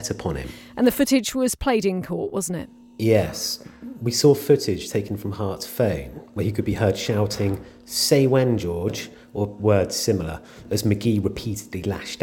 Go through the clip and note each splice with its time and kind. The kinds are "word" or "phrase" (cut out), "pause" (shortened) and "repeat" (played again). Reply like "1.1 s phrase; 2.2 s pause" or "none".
none